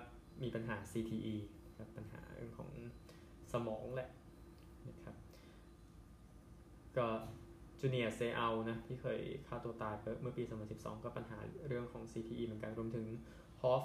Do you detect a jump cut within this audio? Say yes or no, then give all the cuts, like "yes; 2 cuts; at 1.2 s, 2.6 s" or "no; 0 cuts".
no; 0 cuts